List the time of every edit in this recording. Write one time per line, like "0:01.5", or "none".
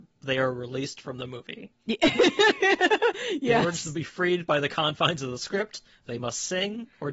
0:01.8